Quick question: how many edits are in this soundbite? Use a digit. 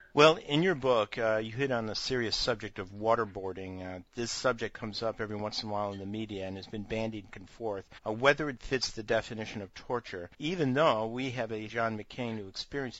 4